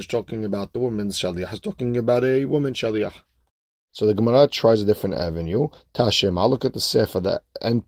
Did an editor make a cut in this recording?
no; 0 cuts

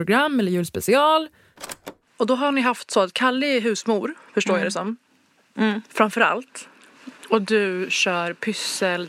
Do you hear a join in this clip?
no; 0 cuts

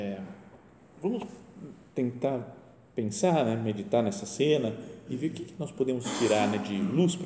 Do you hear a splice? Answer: no; 0 cuts

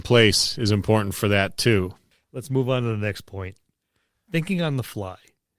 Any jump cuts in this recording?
no; 0 cuts

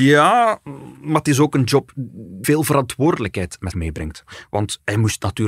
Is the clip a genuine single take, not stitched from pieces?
no; 2 cuts; at 2.4 s, 3.7 s

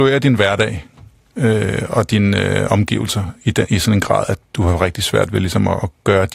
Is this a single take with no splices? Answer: yes; 0 cuts

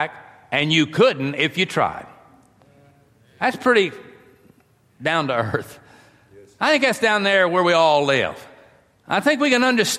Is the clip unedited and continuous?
yes; 0 cuts

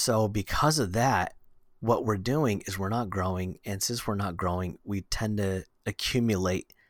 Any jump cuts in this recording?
no; 0 cuts

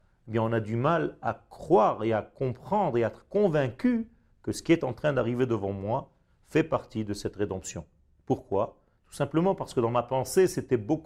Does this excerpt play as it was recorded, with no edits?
yes; 0 cuts

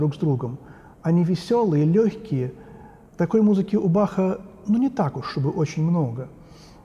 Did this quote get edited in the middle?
no; 0 cuts

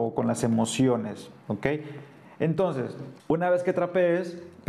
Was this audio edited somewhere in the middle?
yes; 1 cut; at 3.2 s

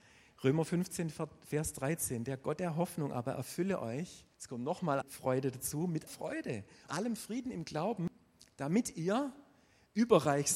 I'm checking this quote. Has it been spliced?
yes; 4 cuts; at 4.3 s, 5.0 s, 6.1 s, 6.9 s

